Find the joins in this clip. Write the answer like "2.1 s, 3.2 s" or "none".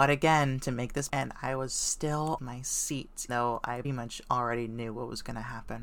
1.1 s, 2.4 s, 3.3 s, 3.8 s